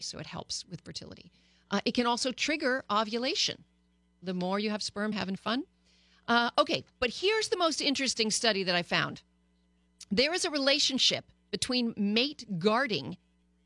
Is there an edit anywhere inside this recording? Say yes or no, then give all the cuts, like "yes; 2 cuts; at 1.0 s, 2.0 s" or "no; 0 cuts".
yes; 1 cut; at 5.1 s